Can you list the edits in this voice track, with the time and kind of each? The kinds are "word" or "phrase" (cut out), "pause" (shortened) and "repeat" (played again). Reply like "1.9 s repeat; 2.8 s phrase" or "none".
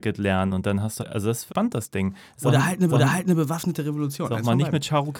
1.0 s word; 1.5 s word; 2.9 s repeat